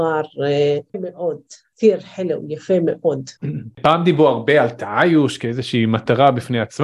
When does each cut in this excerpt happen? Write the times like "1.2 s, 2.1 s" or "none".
0.9 s